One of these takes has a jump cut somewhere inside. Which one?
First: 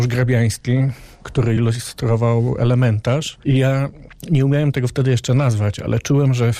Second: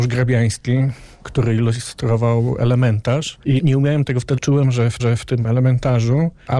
second; 3 cuts; at 3.6 s, 4.4 s, 5.0 s

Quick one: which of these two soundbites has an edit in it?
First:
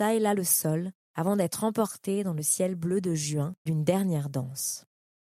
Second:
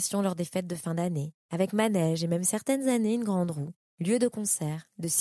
first; 1 cut; at 3.7 s

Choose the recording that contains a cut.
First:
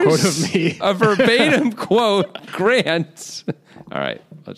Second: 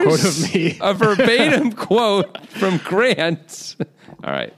first; 1 cut; at 2.5 s

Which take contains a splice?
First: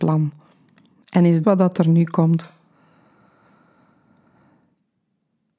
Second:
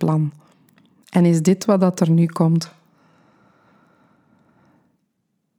first; 1 cut; at 1.4 s

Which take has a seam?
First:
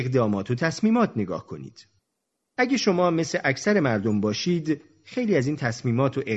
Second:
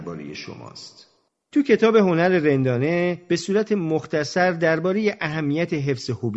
second; 1 cut; at 1.3 s

